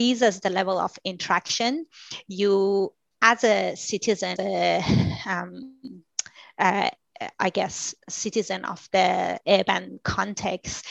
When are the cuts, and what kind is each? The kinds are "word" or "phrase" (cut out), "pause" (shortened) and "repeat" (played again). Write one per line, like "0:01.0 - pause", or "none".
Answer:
0:04.4 - phrase